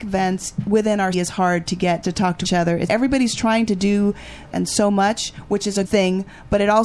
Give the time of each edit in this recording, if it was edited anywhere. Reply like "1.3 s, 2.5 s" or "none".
1.1 s, 2.0 s, 2.4 s, 2.9 s, 4.5 s, 5.8 s